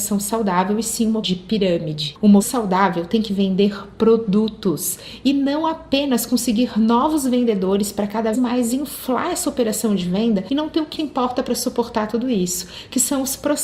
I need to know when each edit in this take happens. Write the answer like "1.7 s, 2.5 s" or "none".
1.2 s, 2.4 s, 8.3 s, 11.0 s